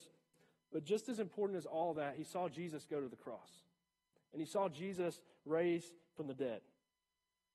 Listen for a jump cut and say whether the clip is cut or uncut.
uncut